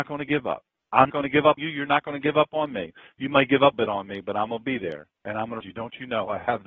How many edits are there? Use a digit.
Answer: 5